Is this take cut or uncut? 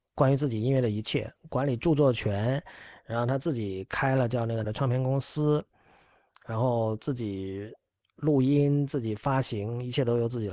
cut